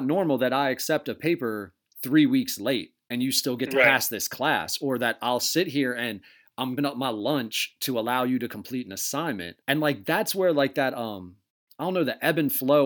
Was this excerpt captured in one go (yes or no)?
no